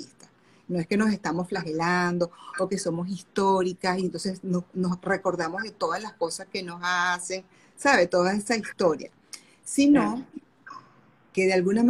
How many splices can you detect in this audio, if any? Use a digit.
0